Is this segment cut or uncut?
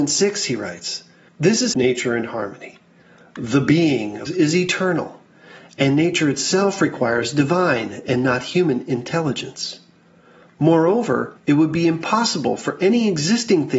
cut